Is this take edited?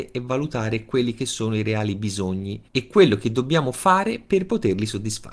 yes; 1 cut; at 2.7 s

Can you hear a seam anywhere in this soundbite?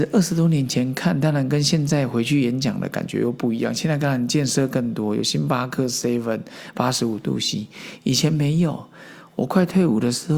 no; 0 cuts

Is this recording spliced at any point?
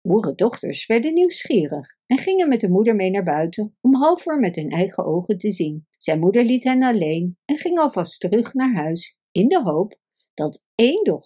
yes; 1 cut; at 5.9 s

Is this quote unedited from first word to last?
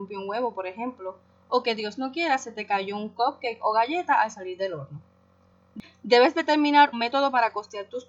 no; 1 cut; at 6.9 s

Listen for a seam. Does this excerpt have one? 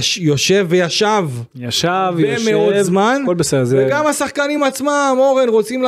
no; 0 cuts

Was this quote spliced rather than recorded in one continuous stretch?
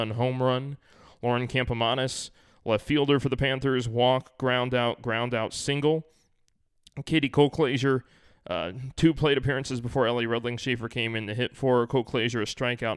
no; 0 cuts

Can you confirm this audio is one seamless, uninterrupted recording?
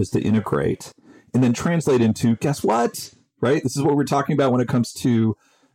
yes; 0 cuts

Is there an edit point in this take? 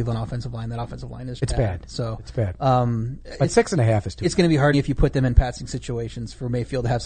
yes; 2 cuts; at 1.4 s, 4.7 s

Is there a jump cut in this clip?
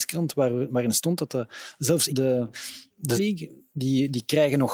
yes; 2 cuts; at 2.1 s, 3.1 s

